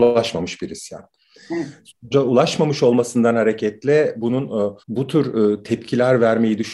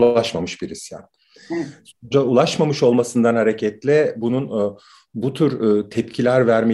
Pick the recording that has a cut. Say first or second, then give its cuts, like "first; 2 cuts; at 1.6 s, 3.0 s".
first; 1 cut; at 4.8 s